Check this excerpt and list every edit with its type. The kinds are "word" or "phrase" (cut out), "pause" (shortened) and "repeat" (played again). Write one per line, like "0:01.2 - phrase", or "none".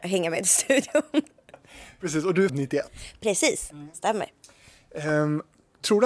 0:02.5 - word